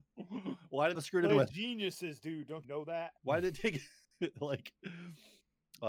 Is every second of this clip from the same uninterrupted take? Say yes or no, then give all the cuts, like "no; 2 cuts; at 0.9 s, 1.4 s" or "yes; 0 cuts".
no; 4 cuts; at 1.0 s, 1.3 s, 2.6 s, 3.2 s